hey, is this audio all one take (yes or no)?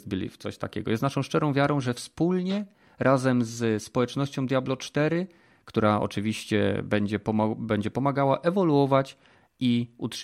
yes